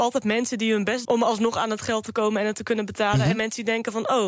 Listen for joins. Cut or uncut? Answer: cut